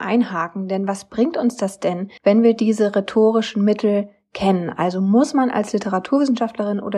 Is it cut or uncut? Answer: cut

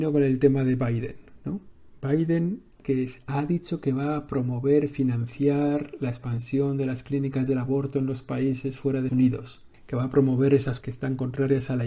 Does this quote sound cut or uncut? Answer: cut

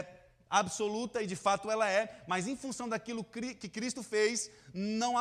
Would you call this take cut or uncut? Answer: uncut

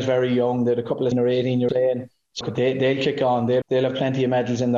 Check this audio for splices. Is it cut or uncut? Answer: cut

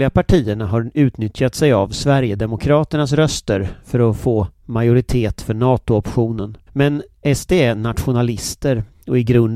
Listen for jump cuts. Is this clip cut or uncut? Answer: cut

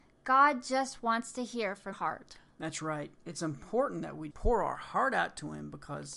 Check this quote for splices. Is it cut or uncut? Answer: cut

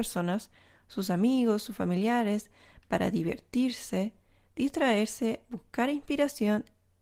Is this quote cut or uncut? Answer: uncut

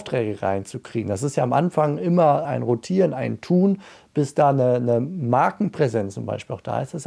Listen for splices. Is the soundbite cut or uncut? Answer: cut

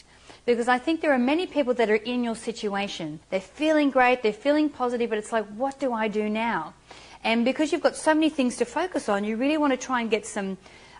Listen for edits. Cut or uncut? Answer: cut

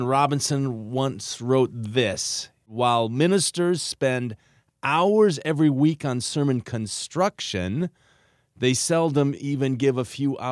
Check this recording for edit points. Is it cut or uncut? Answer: uncut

